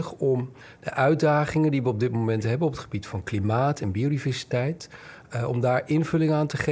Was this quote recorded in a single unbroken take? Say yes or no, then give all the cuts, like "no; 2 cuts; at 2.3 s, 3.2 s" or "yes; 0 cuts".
yes; 0 cuts